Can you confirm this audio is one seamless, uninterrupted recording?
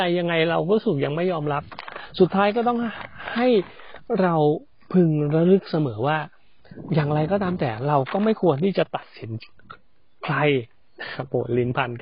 yes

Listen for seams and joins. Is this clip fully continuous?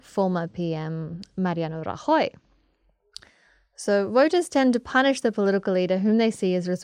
yes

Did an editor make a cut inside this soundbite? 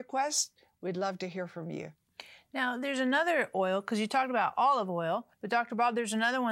yes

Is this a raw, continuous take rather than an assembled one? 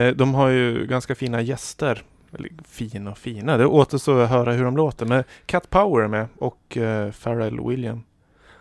yes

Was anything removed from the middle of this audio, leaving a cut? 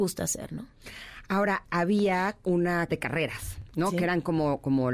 yes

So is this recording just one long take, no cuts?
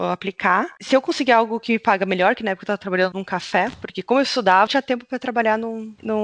no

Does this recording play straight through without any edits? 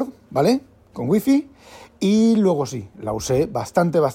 yes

